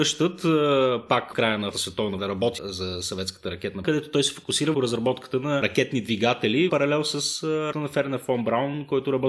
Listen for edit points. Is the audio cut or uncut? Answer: cut